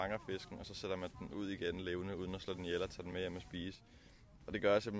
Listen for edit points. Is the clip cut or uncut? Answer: uncut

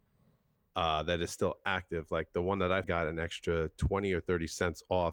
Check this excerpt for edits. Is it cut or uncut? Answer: cut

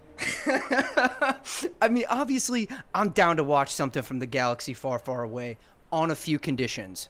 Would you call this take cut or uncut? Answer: uncut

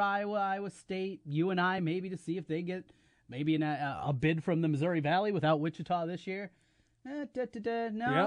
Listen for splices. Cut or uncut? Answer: uncut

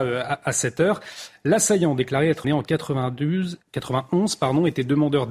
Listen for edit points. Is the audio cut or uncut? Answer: cut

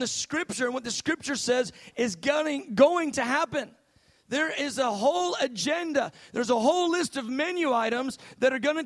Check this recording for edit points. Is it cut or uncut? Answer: uncut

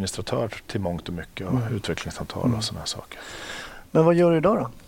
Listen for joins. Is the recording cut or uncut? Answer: uncut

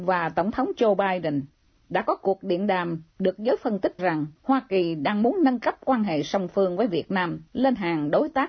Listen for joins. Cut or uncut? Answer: cut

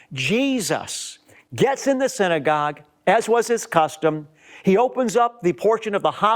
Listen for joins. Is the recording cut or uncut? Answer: uncut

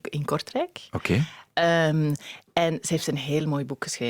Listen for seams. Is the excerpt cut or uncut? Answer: uncut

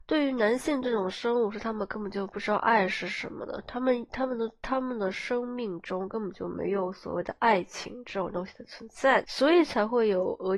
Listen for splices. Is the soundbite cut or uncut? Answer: cut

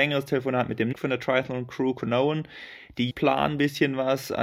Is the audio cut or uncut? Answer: cut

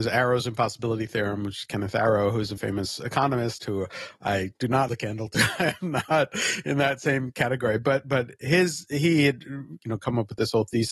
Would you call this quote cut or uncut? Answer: cut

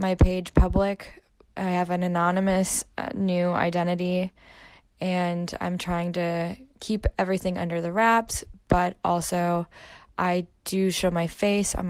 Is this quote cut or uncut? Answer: uncut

